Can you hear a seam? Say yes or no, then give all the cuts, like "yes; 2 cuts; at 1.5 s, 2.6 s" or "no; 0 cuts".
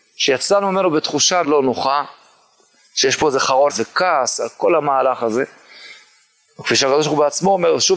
yes; 2 cuts; at 1.4 s, 3.7 s